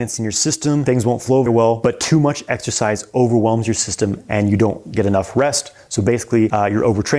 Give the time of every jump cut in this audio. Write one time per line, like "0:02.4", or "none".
0:01.5